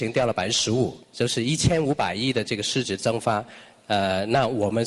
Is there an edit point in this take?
yes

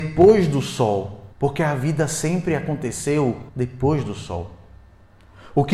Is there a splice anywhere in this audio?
yes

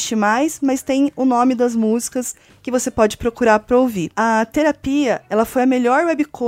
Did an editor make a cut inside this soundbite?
no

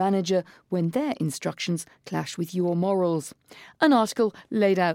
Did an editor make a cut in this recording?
no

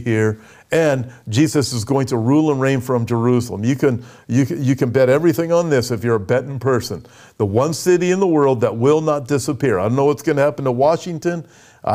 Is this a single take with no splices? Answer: yes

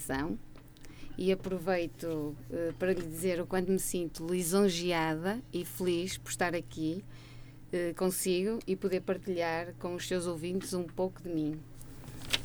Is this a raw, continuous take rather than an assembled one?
yes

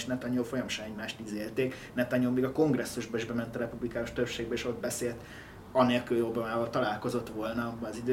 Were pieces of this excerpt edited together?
no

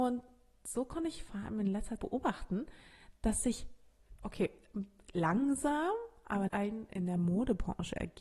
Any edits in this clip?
yes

